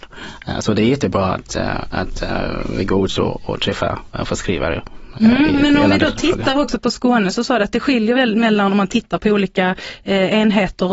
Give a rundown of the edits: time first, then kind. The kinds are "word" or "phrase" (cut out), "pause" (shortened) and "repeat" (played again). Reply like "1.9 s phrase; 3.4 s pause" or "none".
none